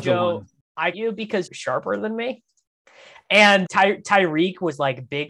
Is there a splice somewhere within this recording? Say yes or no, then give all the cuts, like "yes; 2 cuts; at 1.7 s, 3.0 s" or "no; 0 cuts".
yes; 3 cuts; at 0.9 s, 1.5 s, 3.6 s